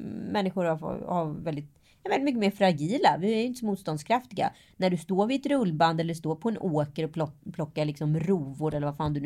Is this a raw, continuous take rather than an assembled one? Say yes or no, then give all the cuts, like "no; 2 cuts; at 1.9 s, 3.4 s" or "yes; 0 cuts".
yes; 0 cuts